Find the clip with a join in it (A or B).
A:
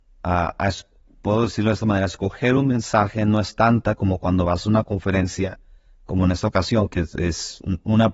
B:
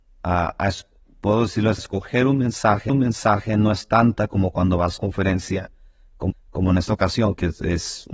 B